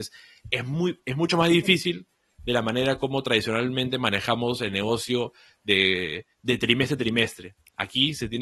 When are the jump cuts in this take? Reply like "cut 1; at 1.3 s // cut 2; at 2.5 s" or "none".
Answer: none